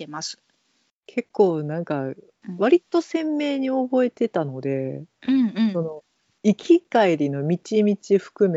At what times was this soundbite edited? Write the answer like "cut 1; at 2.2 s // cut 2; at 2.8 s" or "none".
none